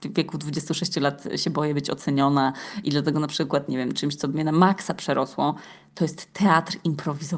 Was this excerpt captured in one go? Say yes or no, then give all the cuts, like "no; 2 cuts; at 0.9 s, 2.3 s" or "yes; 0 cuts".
yes; 0 cuts